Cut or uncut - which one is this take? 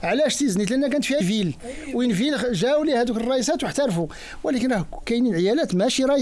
cut